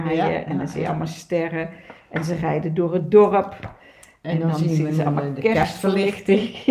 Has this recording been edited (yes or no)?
no